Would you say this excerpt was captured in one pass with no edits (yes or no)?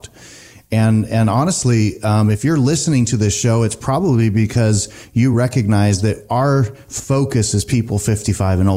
yes